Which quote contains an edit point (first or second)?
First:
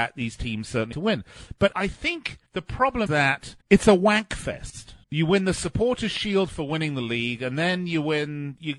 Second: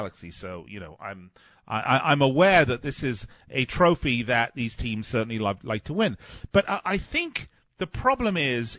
first